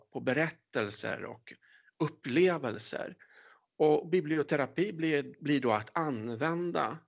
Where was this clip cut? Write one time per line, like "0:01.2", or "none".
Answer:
none